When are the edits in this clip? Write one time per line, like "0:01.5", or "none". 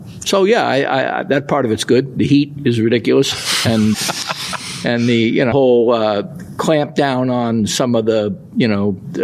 0:03.9
0:05.5